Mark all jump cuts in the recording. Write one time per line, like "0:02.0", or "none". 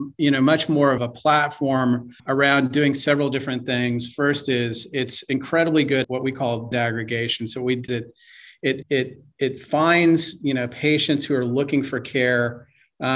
0:01.0
0:02.2
0:06.0
0:06.7
0:07.9
0:08.8
0:09.3